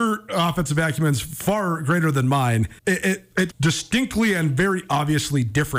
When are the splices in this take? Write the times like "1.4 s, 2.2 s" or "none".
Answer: 2.8 s, 3.5 s